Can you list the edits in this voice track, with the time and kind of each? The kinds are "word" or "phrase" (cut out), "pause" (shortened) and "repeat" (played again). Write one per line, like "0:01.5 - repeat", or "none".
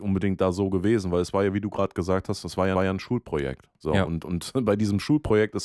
0:02.8 - repeat